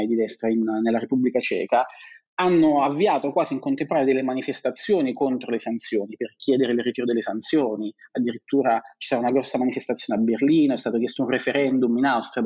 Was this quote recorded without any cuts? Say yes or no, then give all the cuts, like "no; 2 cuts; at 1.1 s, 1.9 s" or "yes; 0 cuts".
yes; 0 cuts